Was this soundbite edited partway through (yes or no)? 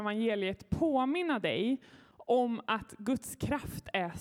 no